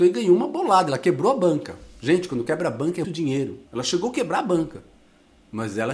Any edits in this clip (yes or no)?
yes